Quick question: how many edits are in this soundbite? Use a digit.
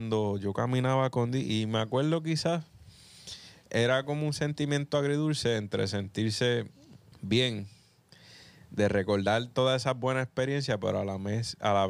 1